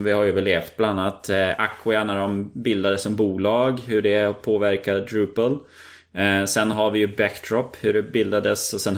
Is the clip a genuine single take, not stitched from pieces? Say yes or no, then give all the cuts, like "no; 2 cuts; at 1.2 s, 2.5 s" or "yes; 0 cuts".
yes; 0 cuts